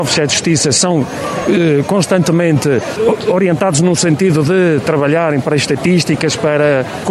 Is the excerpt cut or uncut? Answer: uncut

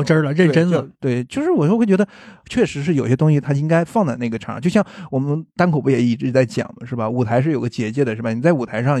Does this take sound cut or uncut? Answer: cut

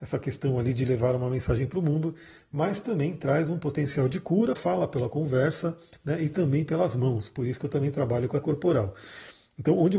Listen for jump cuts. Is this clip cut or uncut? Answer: cut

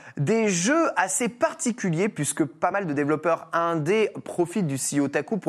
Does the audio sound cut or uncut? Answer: uncut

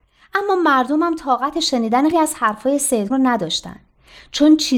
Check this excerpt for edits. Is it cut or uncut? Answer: cut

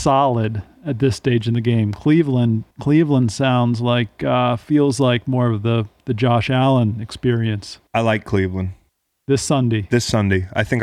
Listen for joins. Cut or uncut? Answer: cut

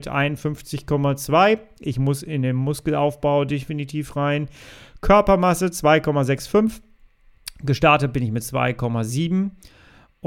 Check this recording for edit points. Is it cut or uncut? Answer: uncut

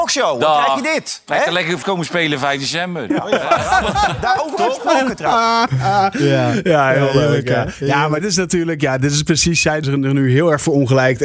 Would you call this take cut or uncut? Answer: cut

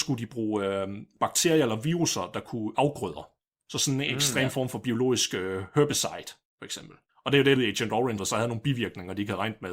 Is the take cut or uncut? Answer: cut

